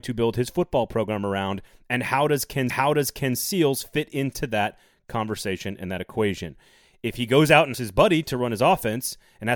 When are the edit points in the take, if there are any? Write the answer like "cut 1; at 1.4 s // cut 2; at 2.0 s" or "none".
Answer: cut 1; at 2.7 s // cut 2; at 7.7 s